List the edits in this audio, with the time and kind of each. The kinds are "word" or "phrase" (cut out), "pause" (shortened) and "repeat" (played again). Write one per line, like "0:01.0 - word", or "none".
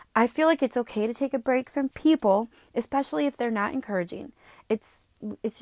0:01.9 - word